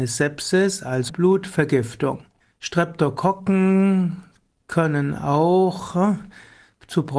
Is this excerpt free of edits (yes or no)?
no